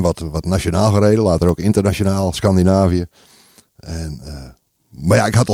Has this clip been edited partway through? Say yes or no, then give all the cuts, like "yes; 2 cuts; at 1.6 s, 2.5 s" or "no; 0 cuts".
no; 0 cuts